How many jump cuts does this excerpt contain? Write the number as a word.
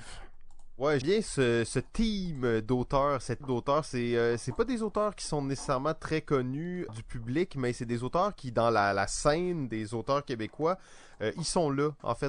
three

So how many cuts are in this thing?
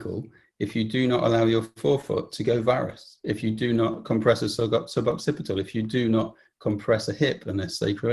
zero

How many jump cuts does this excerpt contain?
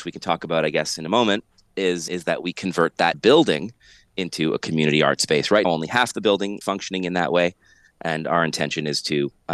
four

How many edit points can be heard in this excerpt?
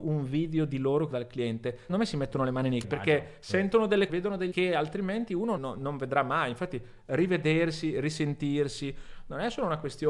six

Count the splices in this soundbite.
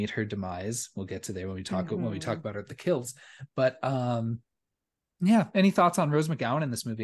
zero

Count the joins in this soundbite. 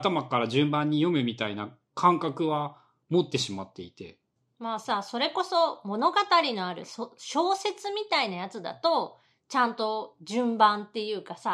zero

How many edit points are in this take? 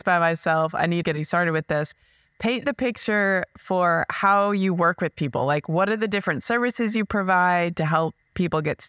one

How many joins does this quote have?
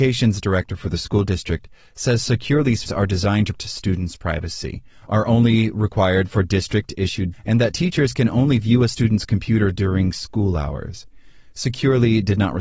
three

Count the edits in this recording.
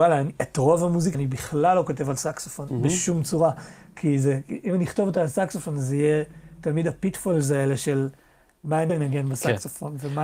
two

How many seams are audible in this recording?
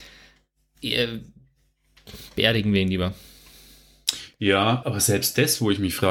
one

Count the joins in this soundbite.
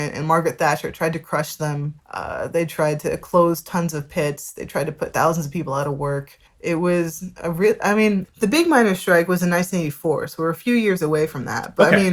two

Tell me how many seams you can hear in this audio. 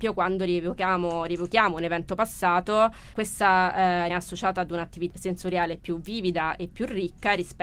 three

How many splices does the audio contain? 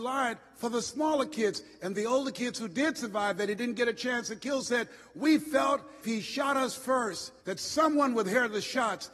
two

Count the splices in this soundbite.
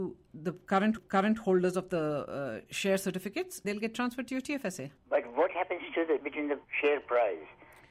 five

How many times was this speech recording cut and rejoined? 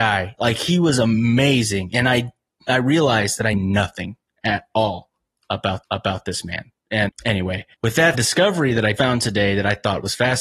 six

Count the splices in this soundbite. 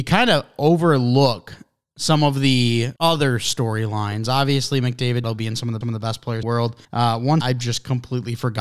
six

